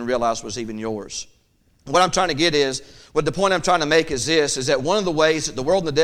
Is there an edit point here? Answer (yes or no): no